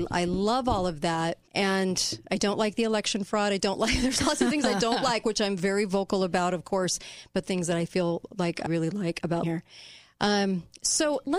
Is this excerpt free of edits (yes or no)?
no